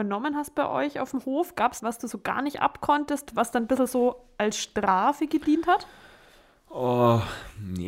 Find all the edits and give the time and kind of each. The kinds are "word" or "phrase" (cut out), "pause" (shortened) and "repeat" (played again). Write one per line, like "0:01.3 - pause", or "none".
0:01.8 - phrase